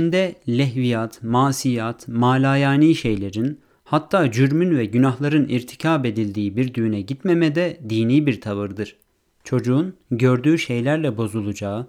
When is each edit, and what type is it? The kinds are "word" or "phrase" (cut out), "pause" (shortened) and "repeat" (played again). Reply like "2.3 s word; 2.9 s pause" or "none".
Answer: none